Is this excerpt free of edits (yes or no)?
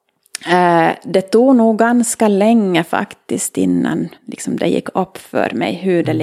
no